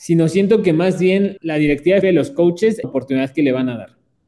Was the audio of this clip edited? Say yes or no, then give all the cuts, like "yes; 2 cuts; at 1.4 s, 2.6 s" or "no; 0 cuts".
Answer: yes; 3 cuts; at 1.4 s, 2.0 s, 2.8 s